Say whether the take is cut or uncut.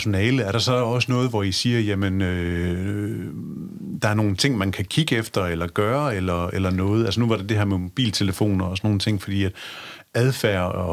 uncut